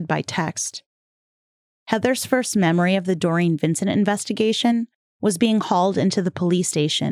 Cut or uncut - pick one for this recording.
uncut